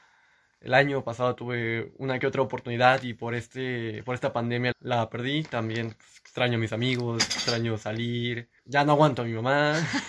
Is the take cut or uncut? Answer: cut